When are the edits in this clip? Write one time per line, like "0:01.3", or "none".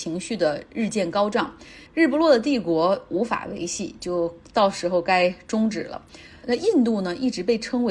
0:01.9